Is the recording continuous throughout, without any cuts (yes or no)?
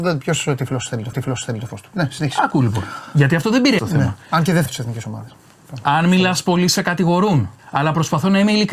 no